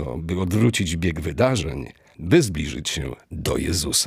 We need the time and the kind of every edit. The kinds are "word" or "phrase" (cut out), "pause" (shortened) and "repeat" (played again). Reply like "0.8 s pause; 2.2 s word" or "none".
2.1 s word

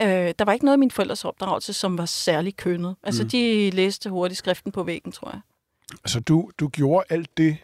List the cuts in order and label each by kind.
none

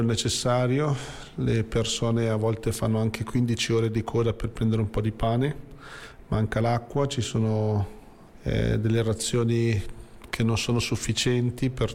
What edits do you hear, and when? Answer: none

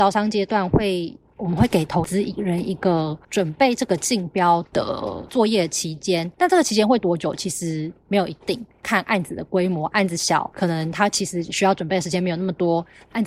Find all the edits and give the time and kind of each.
3.2 s pause; 6.3 s pause

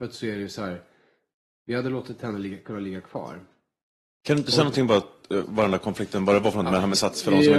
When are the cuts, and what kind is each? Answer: none

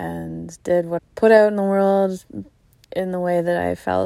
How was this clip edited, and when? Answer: 1.0 s word; 2.8 s word

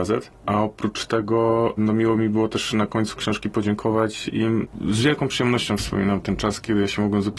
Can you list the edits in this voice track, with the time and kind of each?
none

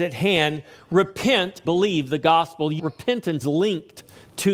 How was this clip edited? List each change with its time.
1.6 s word; 2.8 s phrase; 3.4 s word

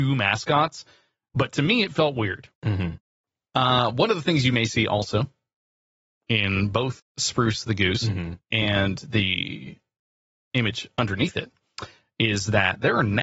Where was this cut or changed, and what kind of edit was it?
2.5 s pause; 7.0 s word

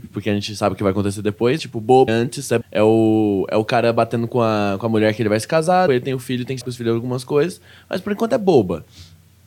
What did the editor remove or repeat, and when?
1.6 s word; 2.1 s word; 2.6 s word; 5.9 s word; 6.6 s word

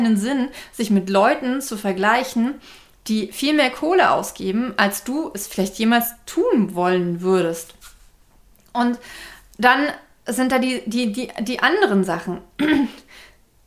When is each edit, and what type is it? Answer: none

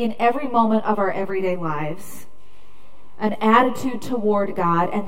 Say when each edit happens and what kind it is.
none

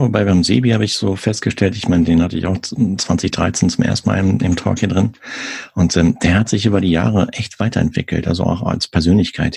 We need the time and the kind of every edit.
none

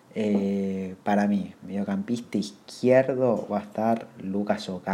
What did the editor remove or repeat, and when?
1.0 s pause

